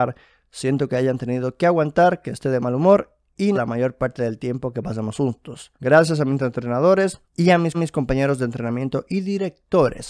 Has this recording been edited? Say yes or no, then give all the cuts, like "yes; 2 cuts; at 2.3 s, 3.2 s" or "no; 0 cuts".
yes; 4 cuts; at 3.5 s, 5.7 s, 7.2 s, 7.7 s